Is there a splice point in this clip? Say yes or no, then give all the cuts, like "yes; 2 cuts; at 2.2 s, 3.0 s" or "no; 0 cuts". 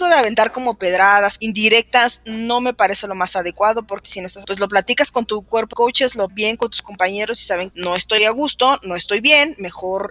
yes; 6 cuts; at 1.4 s, 4.0 s, 4.4 s, 5.7 s, 6.3 s, 7.7 s